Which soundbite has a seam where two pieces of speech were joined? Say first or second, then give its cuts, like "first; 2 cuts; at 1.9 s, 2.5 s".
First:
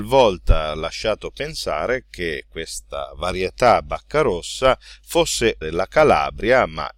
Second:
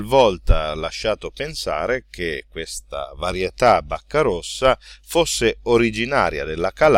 first; 1 cut; at 5.6 s